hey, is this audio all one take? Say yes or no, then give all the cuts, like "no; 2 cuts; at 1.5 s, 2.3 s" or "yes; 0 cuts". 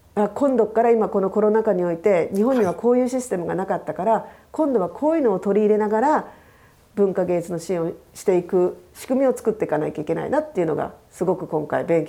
yes; 0 cuts